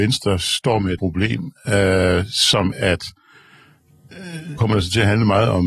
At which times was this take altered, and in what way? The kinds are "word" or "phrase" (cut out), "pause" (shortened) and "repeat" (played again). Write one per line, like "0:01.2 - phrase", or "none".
0:01.0 - word
0:02.7 - word
0:04.6 - word